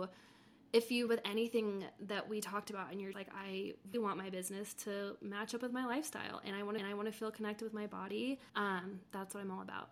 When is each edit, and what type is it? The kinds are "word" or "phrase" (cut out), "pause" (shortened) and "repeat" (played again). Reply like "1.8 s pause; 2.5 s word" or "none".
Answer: 1.1 s word; 3.1 s word; 3.9 s word; 6.8 s repeat; 8.5 s pause